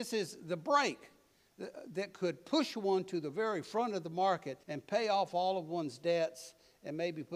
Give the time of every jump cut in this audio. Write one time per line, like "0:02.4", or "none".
0:04.6